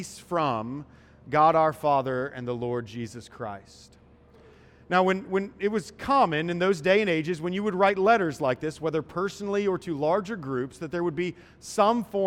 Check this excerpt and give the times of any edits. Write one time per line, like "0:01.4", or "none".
none